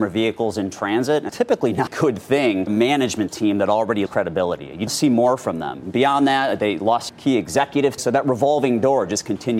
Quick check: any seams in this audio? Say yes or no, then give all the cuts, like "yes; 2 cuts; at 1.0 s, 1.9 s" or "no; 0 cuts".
yes; 7 cuts; at 1.3 s, 1.9 s, 2.7 s, 4.1 s, 4.9 s, 7.1 s, 8.0 s